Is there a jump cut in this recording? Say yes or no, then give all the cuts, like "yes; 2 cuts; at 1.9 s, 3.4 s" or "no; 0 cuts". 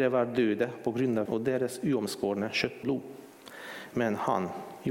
yes; 2 cuts; at 1.2 s, 2.8 s